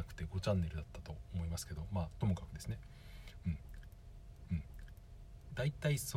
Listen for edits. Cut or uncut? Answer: cut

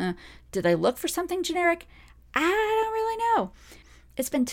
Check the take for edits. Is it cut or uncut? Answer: uncut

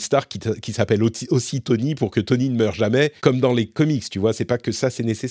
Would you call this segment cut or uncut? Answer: cut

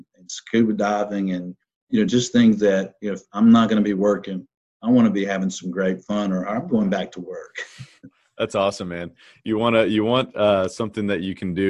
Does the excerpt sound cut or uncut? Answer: uncut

